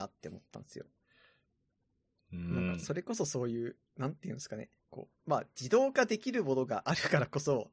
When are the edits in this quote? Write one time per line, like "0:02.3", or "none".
0:04.8